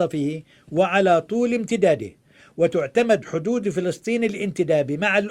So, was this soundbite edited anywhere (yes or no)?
no